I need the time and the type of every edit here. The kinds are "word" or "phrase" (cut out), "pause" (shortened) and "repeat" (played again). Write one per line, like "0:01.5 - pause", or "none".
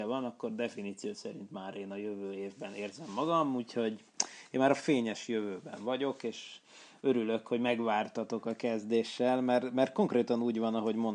none